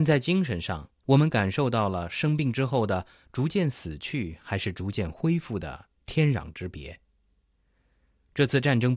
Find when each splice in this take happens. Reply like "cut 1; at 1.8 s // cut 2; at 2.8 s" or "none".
cut 1; at 1.0 s